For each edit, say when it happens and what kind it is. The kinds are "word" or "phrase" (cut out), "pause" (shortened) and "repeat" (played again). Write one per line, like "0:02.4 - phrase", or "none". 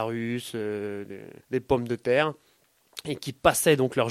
0:01.4 - pause